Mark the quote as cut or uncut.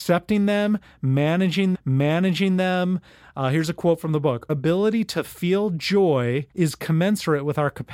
cut